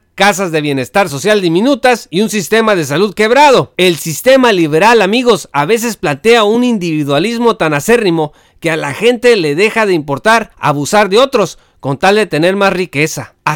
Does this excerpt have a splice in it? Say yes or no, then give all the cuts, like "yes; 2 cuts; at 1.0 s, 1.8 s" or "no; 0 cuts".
no; 0 cuts